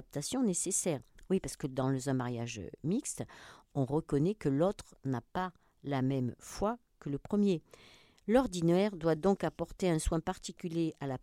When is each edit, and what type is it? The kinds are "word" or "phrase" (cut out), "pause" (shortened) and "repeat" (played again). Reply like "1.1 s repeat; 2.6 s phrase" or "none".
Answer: none